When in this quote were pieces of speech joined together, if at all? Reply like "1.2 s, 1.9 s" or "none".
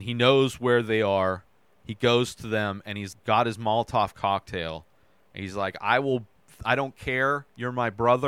3.1 s